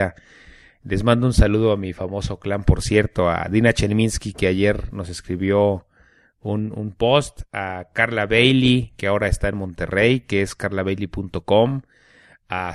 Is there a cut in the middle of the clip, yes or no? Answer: no